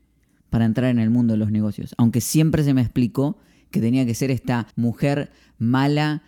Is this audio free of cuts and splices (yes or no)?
no